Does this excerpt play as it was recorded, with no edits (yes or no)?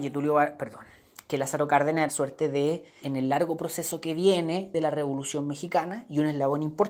no